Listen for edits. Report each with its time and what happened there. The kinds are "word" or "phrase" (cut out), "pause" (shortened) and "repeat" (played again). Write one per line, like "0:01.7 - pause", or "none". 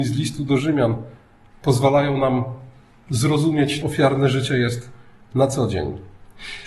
0:03.8 - word